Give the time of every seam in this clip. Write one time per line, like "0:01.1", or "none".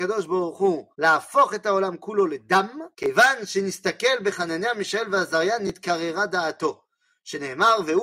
0:00.9
0:02.9